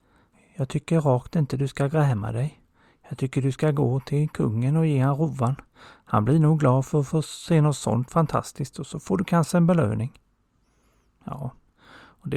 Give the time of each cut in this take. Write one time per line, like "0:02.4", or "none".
none

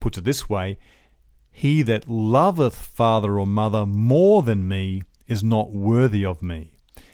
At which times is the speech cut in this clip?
none

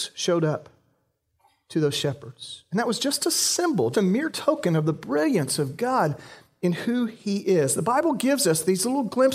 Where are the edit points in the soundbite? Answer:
0:03.9

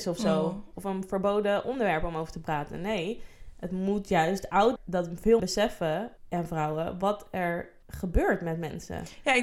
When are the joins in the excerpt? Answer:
0:04.8
0:05.4
0:06.2
0:07.8

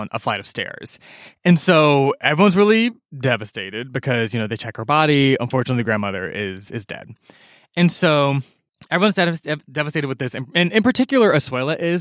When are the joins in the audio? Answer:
none

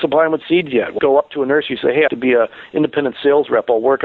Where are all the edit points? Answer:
0:01.0
0:02.1

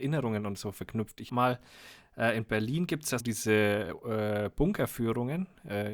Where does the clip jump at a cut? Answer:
0:01.3
0:03.2

